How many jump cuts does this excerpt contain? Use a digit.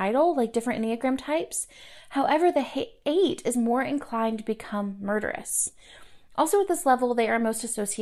0